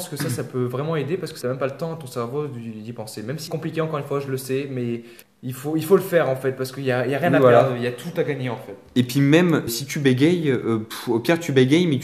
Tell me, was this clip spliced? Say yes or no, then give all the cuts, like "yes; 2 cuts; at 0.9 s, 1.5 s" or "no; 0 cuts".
yes; 4 cuts; at 1.4 s, 3.5 s, 5.2 s, 9.7 s